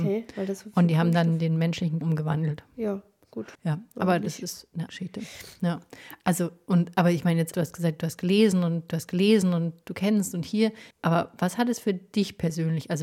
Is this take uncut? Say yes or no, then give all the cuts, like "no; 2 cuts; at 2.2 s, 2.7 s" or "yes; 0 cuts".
no; 6 cuts; at 2.0 s, 3.5 s, 4.9 s, 7.5 s, 8.9 s, 10.9 s